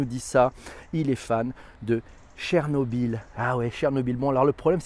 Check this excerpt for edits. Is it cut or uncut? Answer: uncut